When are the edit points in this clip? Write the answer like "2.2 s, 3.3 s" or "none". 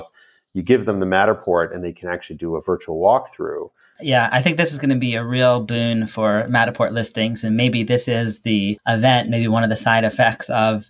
none